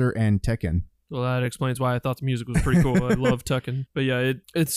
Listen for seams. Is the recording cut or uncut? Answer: uncut